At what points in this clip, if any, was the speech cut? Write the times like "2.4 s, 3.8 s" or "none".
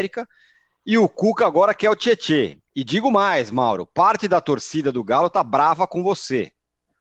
2.6 s

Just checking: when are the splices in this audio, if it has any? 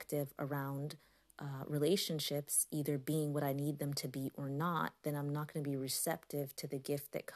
none

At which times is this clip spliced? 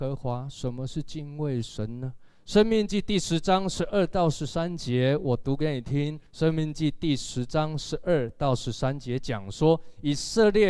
6.3 s

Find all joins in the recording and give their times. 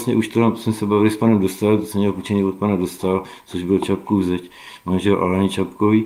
none

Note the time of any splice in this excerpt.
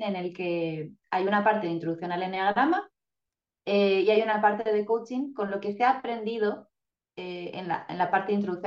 none

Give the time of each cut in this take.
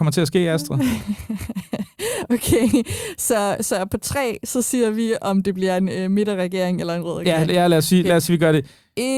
none

